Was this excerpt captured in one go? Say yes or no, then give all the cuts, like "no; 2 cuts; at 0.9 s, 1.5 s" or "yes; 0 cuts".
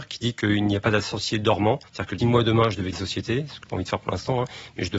no; 4 cuts; at 1.9 s, 2.2 s, 2.9 s, 3.6 s